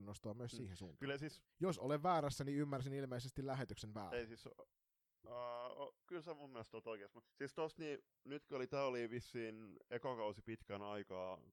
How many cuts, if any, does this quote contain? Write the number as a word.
two